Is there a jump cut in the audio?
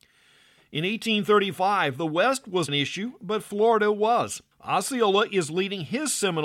yes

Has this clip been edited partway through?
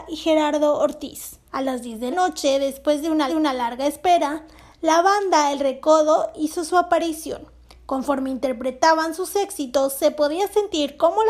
yes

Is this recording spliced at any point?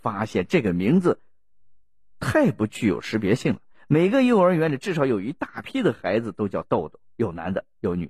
no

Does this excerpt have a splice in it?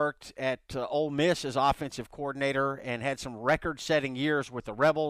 no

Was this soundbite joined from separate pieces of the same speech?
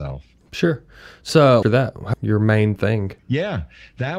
yes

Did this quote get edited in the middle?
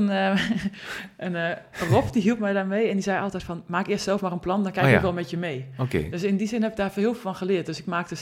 no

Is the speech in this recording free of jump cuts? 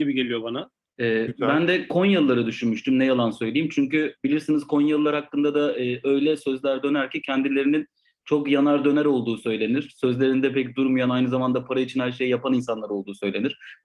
yes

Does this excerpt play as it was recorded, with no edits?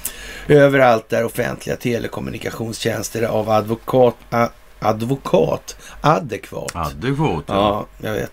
yes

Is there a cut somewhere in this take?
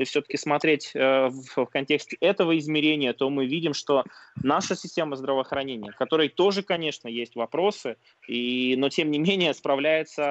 no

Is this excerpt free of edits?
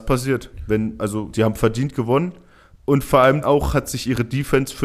no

